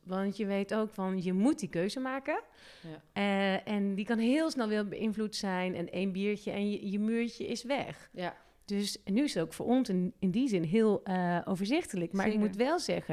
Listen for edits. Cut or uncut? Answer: uncut